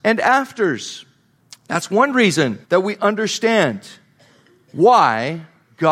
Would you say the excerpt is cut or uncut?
cut